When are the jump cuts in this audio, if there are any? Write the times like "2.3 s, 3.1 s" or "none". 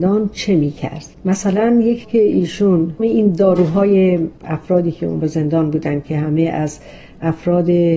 2.0 s, 3.0 s, 5.2 s